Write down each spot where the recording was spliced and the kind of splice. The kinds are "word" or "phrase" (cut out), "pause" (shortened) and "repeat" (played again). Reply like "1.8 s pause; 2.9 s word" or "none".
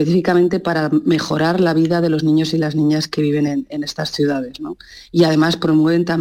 none